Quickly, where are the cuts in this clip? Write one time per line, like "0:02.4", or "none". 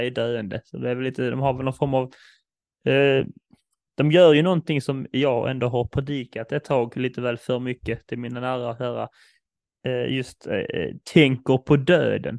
none